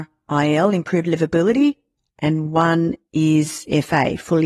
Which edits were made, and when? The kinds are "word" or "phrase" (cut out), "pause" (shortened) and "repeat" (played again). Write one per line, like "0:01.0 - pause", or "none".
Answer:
none